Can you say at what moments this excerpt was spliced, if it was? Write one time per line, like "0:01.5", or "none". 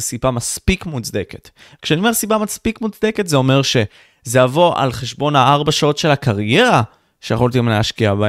none